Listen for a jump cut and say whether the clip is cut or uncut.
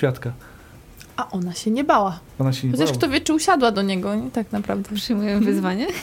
uncut